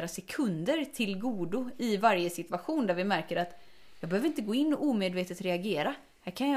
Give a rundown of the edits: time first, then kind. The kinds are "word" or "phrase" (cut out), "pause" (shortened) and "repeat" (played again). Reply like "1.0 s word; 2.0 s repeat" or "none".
none